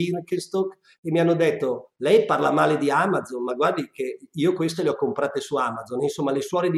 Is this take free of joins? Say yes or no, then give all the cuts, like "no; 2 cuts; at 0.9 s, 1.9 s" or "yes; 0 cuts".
yes; 0 cuts